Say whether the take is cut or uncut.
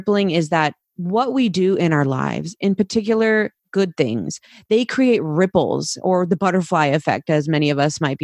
uncut